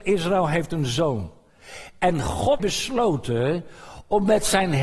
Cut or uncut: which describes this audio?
cut